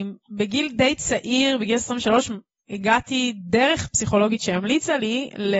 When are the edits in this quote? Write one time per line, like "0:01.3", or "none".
none